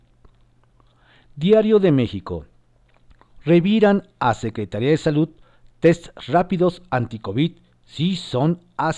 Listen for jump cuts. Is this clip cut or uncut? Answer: uncut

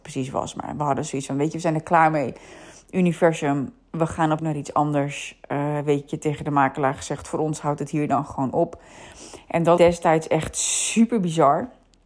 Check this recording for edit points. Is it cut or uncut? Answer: cut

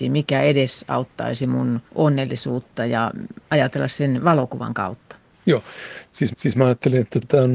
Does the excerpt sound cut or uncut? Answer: cut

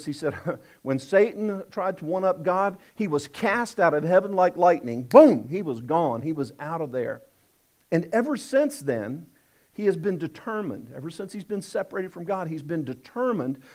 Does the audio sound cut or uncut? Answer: uncut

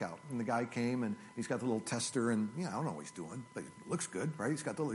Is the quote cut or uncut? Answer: uncut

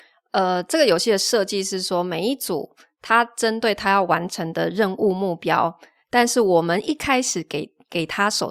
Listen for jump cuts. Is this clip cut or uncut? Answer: uncut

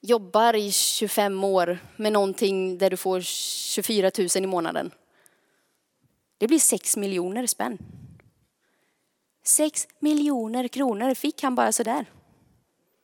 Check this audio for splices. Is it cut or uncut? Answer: uncut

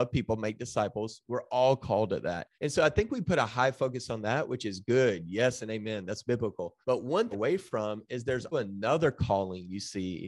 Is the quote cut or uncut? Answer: cut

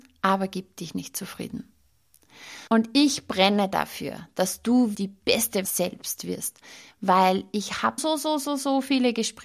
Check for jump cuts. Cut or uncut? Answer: cut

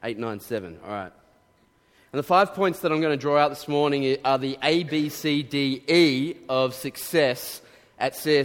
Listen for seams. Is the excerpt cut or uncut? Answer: uncut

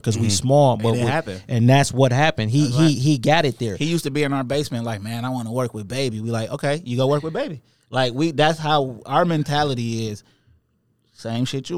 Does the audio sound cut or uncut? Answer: uncut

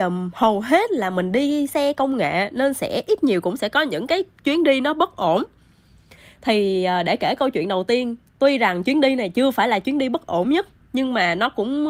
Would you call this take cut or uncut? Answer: uncut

